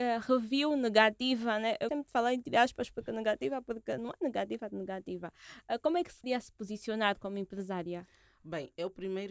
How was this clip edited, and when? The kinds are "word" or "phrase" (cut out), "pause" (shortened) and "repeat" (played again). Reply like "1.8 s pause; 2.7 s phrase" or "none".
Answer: 1.9 s word; 6.2 s word